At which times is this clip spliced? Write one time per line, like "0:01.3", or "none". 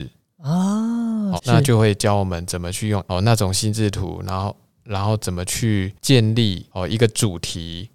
0:01.4
0:03.1